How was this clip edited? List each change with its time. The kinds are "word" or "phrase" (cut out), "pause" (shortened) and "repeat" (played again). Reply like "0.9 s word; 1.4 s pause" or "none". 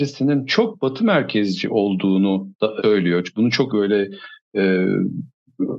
2.8 s word; 3.7 s word